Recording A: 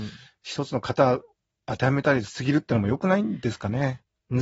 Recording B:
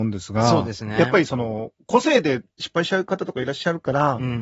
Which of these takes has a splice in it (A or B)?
B